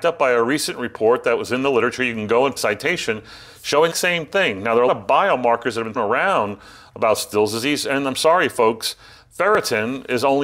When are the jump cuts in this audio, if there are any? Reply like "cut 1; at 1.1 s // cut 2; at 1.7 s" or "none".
cut 1; at 2.6 s // cut 2; at 3.9 s // cut 3; at 4.9 s // cut 4; at 6.0 s

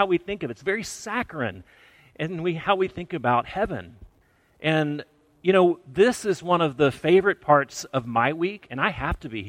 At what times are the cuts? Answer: none

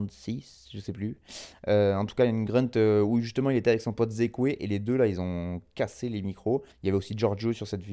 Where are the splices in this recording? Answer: cut 1; at 6.7 s

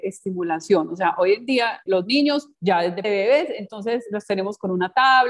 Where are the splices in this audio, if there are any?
cut 1; at 1.9 s // cut 2; at 2.5 s // cut 3; at 3.0 s

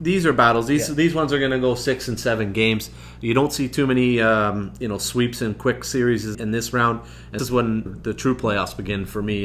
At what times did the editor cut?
cut 1; at 6.3 s // cut 2; at 7.4 s // cut 3; at 7.9 s

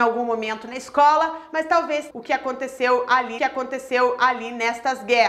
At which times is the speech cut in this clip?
cut 1; at 2.1 s // cut 2; at 3.4 s

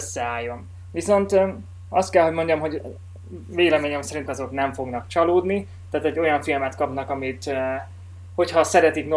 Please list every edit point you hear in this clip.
cut 1; at 4.3 s

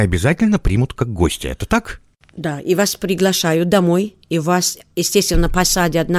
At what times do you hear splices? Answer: none

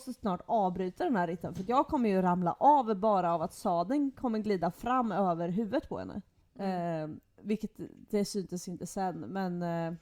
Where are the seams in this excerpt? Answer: cut 1; at 6.4 s

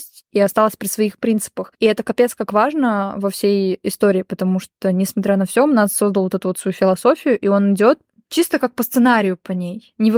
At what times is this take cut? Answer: none

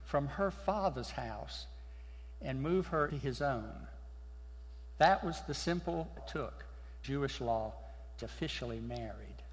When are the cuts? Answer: cut 1; at 3.1 s // cut 2; at 6.2 s // cut 3; at 7.0 s // cut 4; at 8.2 s

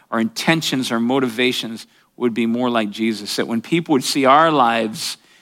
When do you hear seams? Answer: none

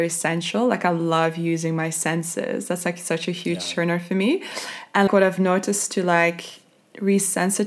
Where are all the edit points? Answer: cut 1; at 5.1 s

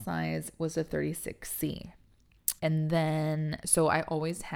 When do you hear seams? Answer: cut 1; at 2.6 s

